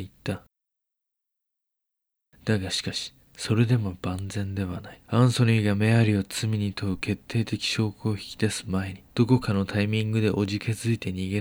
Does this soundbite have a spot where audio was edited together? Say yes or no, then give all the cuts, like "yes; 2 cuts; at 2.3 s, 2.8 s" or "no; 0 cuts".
yes; 2 cuts; at 5.0 s, 9.1 s